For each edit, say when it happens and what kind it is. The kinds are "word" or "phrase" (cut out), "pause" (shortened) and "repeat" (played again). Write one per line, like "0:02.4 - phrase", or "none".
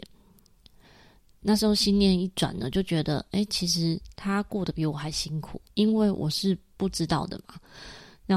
0:05.7 - pause